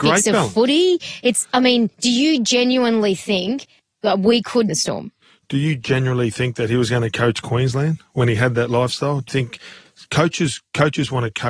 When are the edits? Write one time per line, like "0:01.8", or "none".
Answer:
0:03.8
0:04.7
0:05.2
0:09.3